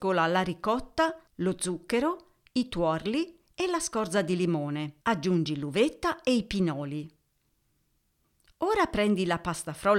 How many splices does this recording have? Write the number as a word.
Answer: two